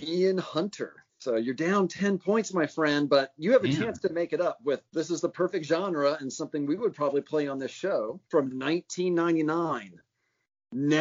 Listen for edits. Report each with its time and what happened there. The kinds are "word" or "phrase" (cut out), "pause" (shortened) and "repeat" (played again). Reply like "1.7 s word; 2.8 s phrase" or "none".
4.9 s pause; 8.2 s pause